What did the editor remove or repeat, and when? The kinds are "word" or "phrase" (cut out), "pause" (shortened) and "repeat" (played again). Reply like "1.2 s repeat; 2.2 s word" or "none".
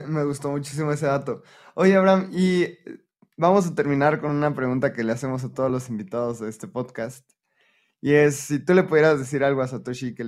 none